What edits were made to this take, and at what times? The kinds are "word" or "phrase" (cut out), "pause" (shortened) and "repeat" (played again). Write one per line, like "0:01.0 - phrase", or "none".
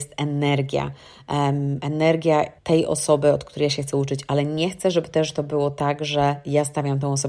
0:02.6 - pause